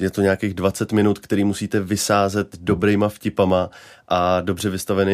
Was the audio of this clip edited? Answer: no; 0 cuts

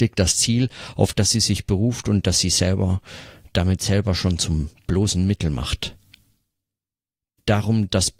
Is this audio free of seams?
yes; 0 cuts

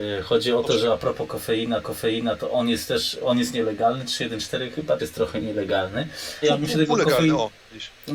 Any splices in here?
yes; 3 cuts; at 1.8 s, 5.0 s, 6.4 s

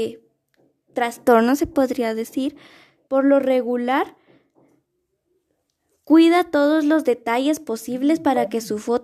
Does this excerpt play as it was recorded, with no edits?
no; 1 cut; at 3.1 s

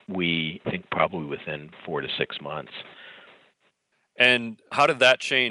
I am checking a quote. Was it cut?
no; 0 cuts

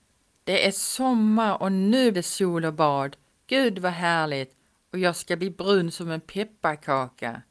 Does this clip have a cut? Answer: yes; 1 cut; at 2.1 s

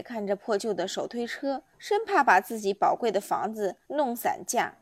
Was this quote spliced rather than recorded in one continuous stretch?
yes; 2 cuts; at 1.7 s, 3.8 s

